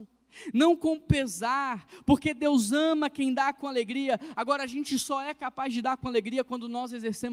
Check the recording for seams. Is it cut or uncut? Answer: uncut